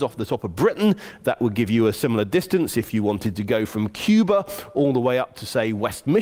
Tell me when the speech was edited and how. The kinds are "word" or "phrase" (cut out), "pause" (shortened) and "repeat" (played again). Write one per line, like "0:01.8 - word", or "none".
none

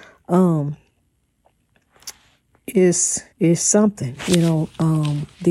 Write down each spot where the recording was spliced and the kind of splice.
0:03.3 - pause

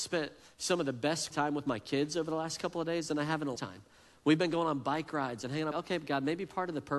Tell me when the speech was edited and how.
0:01.3 - word
0:03.6 - word
0:05.7 - word

